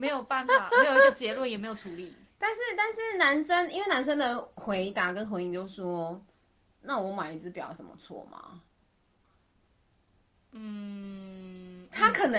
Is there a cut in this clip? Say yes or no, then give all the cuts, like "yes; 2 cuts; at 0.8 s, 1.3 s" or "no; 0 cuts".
no; 0 cuts